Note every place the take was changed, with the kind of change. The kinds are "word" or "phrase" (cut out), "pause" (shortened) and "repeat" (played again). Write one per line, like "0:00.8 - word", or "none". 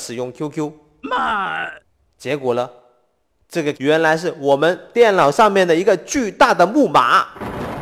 0:03.7 - word